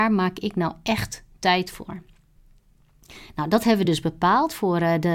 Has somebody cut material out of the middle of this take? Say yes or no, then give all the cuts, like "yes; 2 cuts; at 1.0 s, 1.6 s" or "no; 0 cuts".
no; 0 cuts